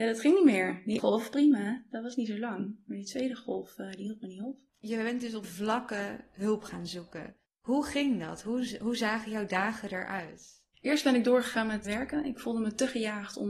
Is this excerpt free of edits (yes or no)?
no